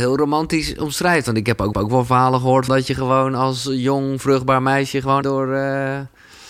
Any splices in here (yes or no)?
yes